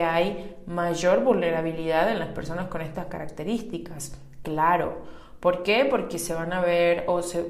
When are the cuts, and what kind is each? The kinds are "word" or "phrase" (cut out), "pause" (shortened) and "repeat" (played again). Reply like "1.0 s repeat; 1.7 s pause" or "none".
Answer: none